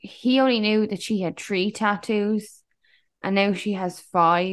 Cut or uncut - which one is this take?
uncut